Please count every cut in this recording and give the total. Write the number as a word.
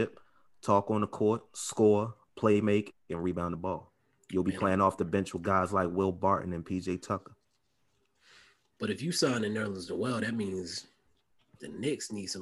zero